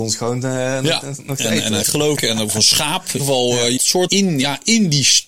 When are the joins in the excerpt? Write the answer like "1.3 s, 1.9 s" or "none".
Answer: 1.8 s, 2.1 s, 3.2 s, 3.8 s, 4.1 s